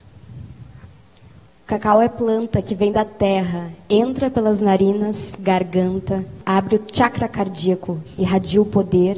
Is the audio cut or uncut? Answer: uncut